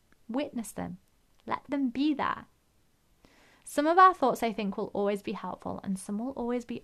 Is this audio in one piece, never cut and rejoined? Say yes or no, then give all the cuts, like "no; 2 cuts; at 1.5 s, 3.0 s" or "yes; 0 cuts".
yes; 0 cuts